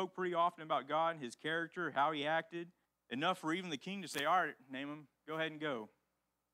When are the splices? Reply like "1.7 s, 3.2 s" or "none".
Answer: 2.8 s